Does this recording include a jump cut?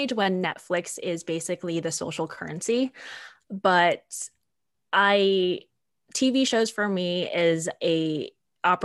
no; 0 cuts

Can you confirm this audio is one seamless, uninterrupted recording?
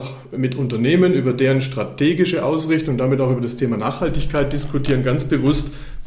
yes; 0 cuts

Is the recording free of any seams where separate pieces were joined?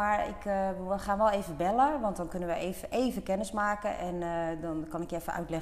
yes; 0 cuts

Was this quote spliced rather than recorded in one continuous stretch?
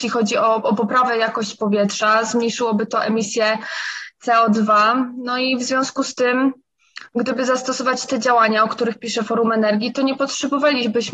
no; 0 cuts

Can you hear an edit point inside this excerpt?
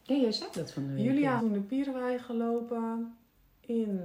yes; 1 cut; at 1.4 s

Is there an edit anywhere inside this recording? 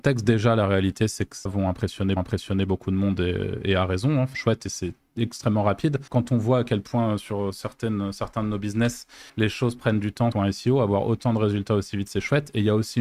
yes; 6 cuts; at 1.5 s, 2.2 s, 4.3 s, 6.1 s, 9.3 s, 10.3 s

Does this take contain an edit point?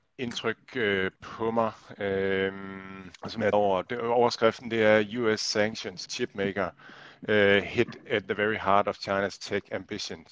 yes; 4 cuts; at 1.2 s, 3.1 s, 3.5 s, 6.1 s

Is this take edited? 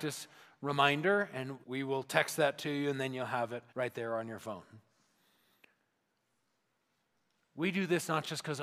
yes; 2 cuts; at 1.6 s, 3.7 s

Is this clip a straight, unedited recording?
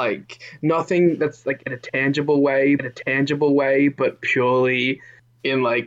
no; 1 cut; at 2.8 s

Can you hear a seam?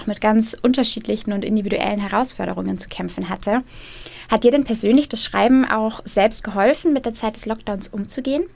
no; 0 cuts

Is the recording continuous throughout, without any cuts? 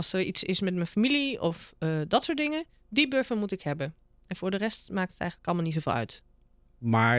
yes; 0 cuts

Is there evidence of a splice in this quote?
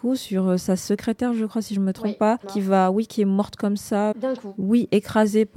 yes; 2 cuts; at 2.4 s, 4.1 s

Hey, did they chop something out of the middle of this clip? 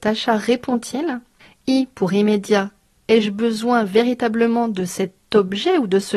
no; 0 cuts

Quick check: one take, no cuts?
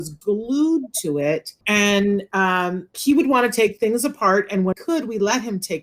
no; 3 cuts; at 1.6 s, 2.9 s, 4.7 s

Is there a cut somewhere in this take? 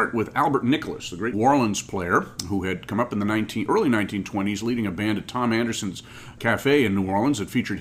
yes; 2 cuts; at 1.3 s, 6.4 s

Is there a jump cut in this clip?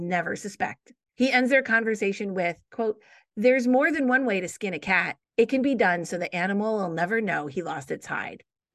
no; 0 cuts

